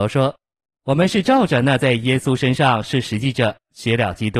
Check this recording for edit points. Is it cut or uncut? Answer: uncut